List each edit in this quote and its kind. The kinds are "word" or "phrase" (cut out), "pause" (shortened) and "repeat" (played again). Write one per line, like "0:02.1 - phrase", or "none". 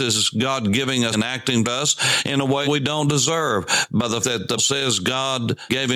0:01.1 - word
0:01.6 - word
0:02.6 - word
0:04.2 - word
0:04.6 - word